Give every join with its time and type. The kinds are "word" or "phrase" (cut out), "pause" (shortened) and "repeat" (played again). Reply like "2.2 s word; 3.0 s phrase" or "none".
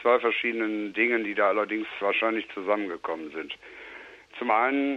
2.0 s word